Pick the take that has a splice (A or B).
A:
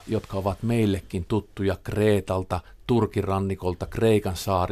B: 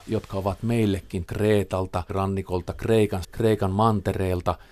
B